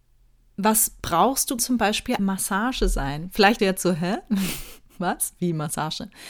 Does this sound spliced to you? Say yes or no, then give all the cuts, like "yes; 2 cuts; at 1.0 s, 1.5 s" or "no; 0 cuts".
yes; 3 cuts; at 1.6 s, 2.2 s, 3.6 s